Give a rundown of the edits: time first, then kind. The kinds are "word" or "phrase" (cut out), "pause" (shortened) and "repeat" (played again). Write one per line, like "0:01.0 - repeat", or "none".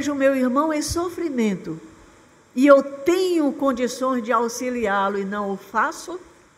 none